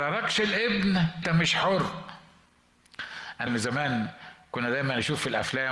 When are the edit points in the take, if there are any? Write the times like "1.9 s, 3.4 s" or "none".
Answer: 1.2 s, 3.5 s